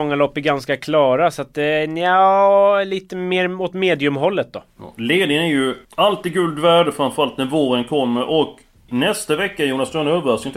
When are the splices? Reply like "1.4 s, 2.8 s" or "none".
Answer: 5.8 s, 8.9 s